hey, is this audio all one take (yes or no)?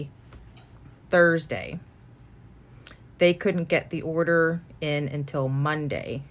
yes